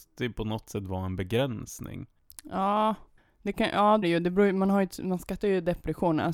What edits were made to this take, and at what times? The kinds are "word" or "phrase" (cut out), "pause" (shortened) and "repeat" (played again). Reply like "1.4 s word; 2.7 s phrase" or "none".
3.2 s pause; 4.0 s word